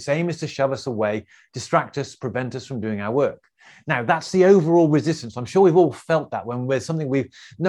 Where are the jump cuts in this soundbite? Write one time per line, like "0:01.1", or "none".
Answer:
none

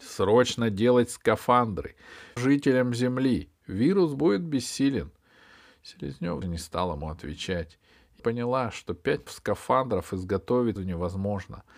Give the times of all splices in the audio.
0:02.4
0:06.4
0:08.2
0:09.3
0:10.8

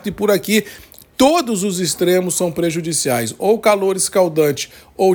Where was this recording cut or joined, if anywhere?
none

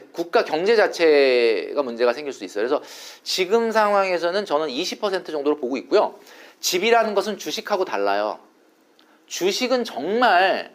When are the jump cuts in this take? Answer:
none

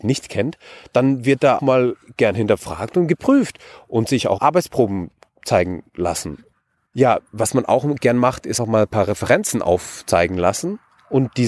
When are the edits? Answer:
0:01.6
0:04.4
0:08.6

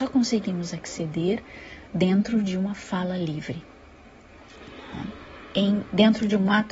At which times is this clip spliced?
0:01.9

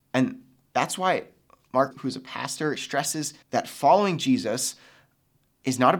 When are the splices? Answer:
0:01.9
0:02.7
0:03.4

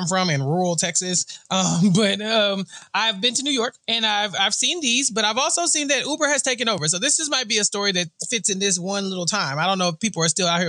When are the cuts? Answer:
0:03.8

